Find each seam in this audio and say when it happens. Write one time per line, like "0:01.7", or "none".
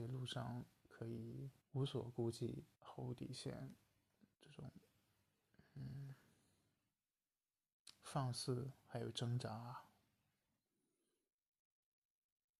0:01.6
0:02.7
0:04.3